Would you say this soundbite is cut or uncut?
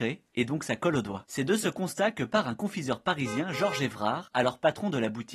uncut